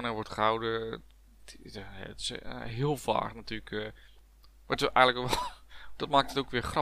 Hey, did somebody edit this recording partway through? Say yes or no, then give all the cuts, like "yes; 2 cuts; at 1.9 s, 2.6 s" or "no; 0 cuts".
no; 0 cuts